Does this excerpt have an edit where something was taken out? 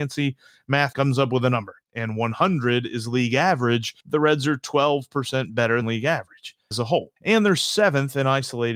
yes; 6 cuts; at 0.9 s, 1.8 s, 4.0 s, 5.8 s, 6.7 s, 7.2 s

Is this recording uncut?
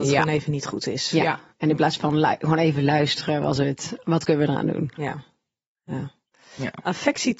yes; 0 cuts

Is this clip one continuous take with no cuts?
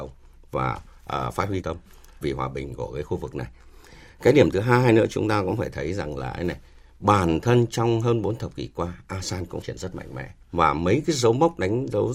no; 5 cuts; at 1.0 s, 1.6 s, 2.2 s, 9.6 s, 10.4 s

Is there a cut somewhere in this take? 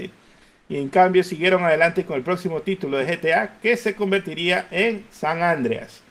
no; 0 cuts

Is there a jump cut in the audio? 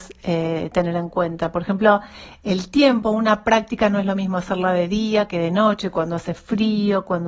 no; 0 cuts

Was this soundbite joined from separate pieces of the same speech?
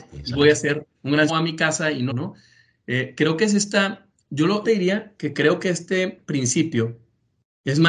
yes; 4 cuts; at 0.9 s, 1.3 s, 2.1 s, 4.6 s

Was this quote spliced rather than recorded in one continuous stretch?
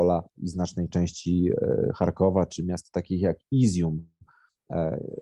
no; 0 cuts

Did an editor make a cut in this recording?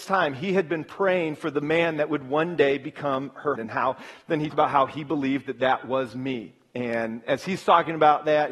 yes; 2 cuts; at 3.5 s, 4.5 s

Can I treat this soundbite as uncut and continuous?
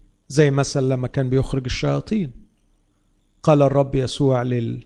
yes; 0 cuts

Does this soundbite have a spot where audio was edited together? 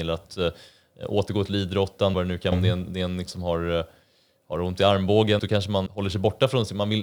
yes; 5 cuts; at 2.1 s, 2.5 s, 3.3 s, 5.4 s, 5.9 s

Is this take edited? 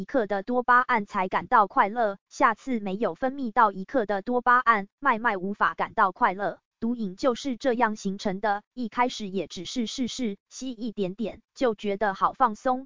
yes; 1 cut; at 6.7 s

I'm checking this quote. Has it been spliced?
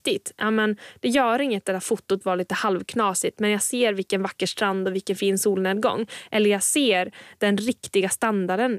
no; 0 cuts

